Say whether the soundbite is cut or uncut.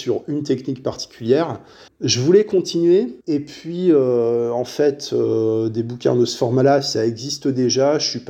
cut